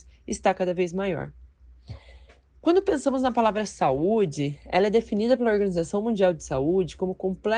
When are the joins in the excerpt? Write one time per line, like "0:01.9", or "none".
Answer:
none